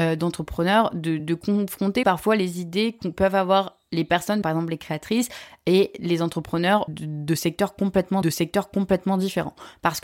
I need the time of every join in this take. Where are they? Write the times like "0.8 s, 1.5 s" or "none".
1.2 s, 2.0 s, 4.4 s, 6.9 s, 8.2 s